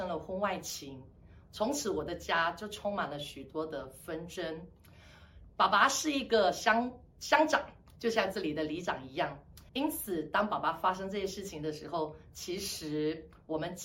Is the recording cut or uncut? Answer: cut